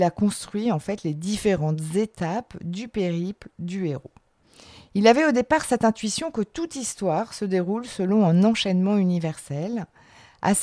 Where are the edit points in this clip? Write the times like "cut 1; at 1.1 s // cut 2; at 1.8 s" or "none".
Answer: none